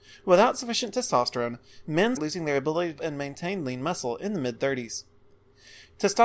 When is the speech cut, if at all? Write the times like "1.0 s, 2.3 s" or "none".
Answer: 2.2 s, 3.0 s